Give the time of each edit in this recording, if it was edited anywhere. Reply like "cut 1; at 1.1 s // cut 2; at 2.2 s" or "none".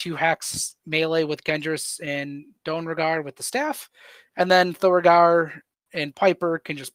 none